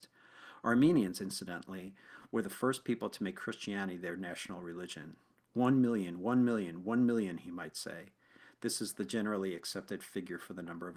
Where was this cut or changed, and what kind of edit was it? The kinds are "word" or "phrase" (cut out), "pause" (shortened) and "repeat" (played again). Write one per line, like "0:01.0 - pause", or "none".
none